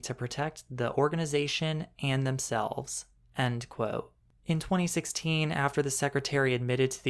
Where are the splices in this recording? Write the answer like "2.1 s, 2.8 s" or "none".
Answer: none